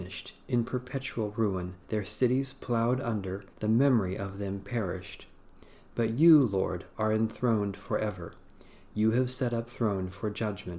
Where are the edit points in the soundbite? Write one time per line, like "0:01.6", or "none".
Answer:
0:01.8
0:03.5
0:09.7